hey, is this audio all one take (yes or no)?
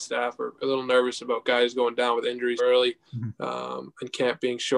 no